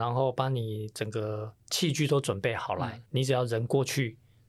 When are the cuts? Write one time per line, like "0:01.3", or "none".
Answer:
0:03.1